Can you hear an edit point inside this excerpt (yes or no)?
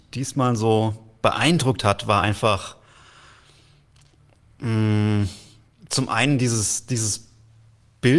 no